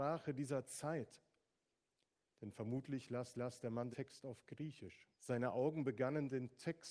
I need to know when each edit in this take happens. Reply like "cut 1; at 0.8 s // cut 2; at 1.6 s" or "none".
cut 1; at 3.3 s // cut 2; at 3.9 s // cut 3; at 5.1 s